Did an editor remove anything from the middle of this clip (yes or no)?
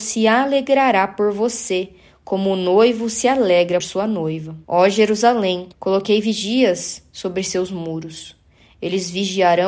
yes